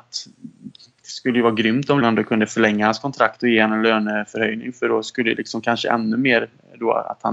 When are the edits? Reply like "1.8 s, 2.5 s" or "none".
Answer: 2.0 s